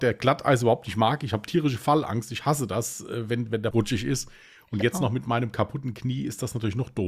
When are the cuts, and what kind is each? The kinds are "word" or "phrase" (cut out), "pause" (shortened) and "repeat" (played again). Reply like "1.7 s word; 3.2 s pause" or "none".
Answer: 3.7 s word